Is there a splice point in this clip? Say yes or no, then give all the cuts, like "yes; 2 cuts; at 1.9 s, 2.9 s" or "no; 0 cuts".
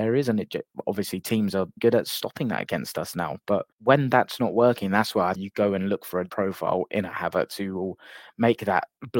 yes; 4 cuts; at 1.8 s, 3.7 s, 5.4 s, 6.3 s